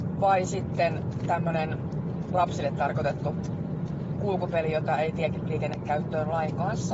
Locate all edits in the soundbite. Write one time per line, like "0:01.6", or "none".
none